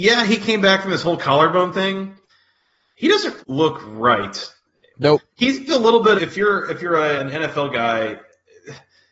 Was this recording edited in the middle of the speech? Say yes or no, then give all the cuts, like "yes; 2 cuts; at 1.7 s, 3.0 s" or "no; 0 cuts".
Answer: yes; 4 cuts; at 3.4 s, 5.7 s, 6.2 s, 7.2 s